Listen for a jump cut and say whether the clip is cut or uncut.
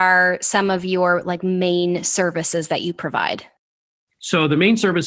uncut